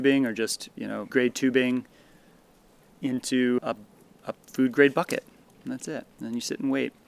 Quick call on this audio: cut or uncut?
cut